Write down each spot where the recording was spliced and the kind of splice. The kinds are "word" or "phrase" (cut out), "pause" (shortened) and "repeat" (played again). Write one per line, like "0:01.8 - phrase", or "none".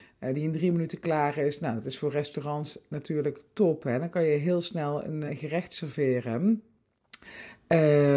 0:05.3 - word